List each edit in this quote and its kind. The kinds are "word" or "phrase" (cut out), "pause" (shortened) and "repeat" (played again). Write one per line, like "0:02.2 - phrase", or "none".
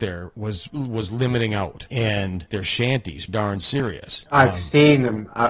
0:02.5 - phrase
0:03.3 - word